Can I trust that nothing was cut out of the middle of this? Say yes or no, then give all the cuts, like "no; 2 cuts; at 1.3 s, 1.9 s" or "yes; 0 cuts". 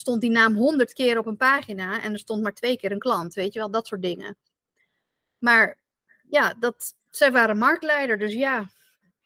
yes; 0 cuts